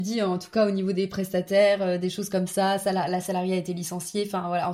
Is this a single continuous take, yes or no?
yes